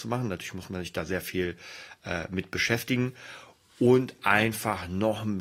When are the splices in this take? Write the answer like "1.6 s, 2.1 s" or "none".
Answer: none